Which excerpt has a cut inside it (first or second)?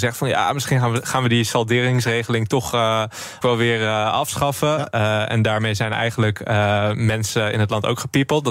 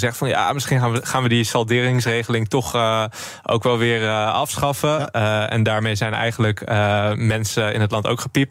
first